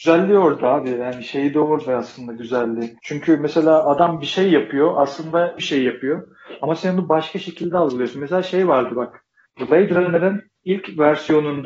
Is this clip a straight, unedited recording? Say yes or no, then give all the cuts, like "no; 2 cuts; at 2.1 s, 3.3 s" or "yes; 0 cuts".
no; 3 cuts; at 3.0 s, 5.6 s, 9.5 s